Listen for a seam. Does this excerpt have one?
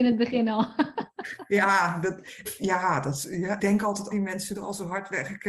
yes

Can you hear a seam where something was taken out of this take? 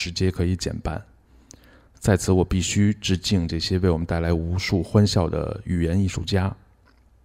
no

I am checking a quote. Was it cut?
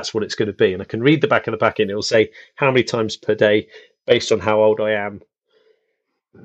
no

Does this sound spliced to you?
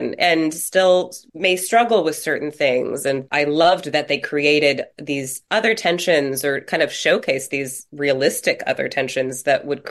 no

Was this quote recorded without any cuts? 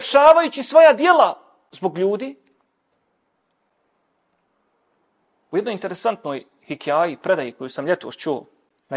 yes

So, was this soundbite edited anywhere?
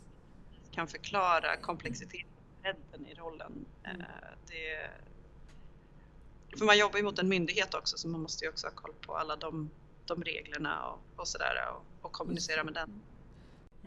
yes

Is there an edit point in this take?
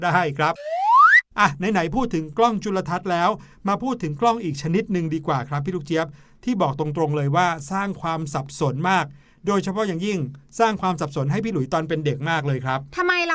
no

